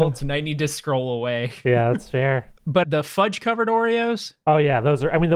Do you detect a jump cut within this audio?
yes; 1 cut; at 2.8 s

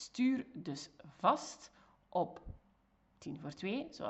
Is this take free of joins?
yes; 0 cuts

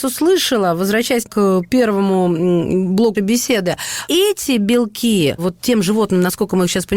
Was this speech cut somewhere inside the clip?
yes; 4 cuts; at 1.2 s, 3.1 s, 4.1 s, 5.4 s

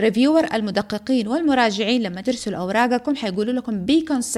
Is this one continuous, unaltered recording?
no; 1 cut; at 2.2 s

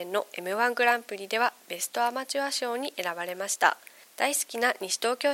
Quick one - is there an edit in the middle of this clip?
no; 0 cuts

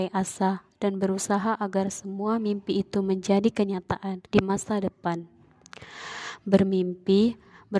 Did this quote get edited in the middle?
yes; 1 cut; at 4.3 s

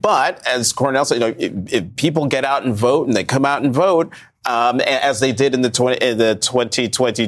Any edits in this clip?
no; 0 cuts

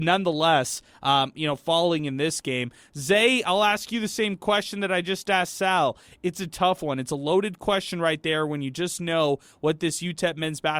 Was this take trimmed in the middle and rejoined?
no; 0 cuts

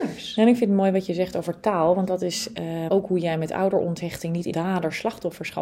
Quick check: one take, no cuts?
no; 2 cuts; at 2.9 s, 4.5 s

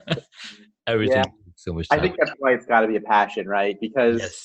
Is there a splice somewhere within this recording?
no; 0 cuts

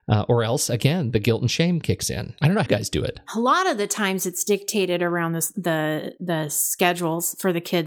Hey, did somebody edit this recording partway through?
yes; 1 cut; at 2.7 s

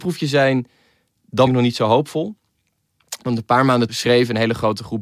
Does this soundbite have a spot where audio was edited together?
yes; 2 cuts; at 1.5 s, 3.9 s

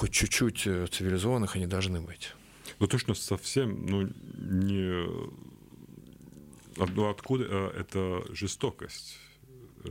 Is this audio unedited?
yes; 0 cuts

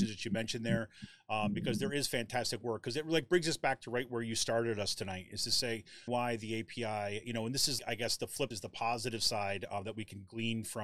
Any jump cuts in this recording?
yes; 3 cuts; at 6.1 s, 7.8 s, 8.5 s

